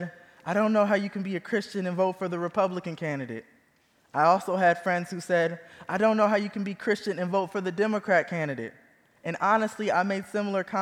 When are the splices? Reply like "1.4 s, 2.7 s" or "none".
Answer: none